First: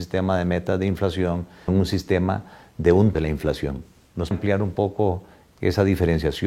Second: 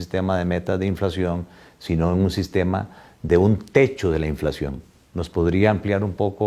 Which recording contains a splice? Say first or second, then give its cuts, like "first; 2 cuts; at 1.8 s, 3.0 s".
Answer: first; 3 cuts; at 1.7 s, 3.1 s, 4.3 s